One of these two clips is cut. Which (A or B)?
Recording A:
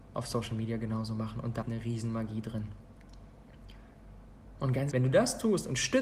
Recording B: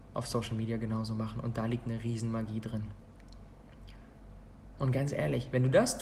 A